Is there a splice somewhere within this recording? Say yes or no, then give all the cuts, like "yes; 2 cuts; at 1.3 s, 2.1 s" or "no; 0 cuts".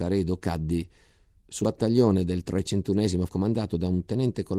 yes; 2 cuts; at 1.6 s, 3.3 s